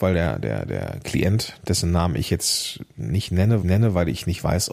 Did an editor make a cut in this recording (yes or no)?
yes